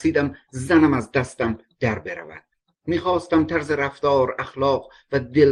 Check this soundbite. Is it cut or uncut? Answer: uncut